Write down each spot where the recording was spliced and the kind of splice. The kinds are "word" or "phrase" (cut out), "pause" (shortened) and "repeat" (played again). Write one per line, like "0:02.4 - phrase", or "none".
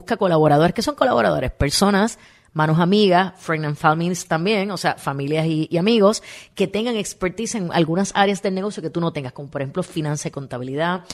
none